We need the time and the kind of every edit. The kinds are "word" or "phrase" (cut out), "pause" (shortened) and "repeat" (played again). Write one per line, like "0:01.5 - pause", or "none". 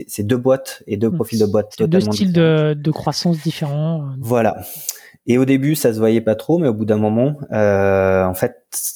none